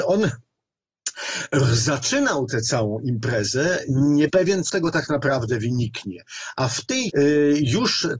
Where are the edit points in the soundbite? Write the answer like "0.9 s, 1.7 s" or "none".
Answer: 4.3 s, 4.7 s, 7.1 s